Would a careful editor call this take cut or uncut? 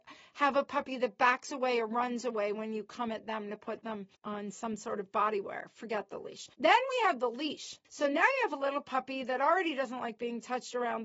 cut